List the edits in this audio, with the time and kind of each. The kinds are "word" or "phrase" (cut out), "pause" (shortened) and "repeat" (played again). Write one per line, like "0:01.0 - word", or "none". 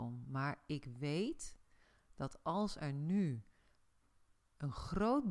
none